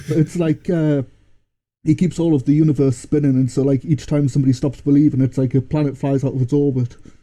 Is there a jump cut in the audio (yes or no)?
no